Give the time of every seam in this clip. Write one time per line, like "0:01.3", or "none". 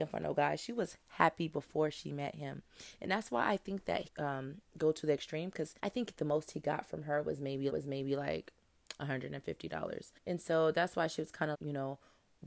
0:04.1
0:05.8
0:07.7
0:10.2
0:11.5